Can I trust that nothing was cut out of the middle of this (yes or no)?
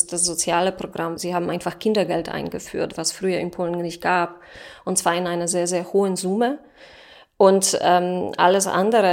yes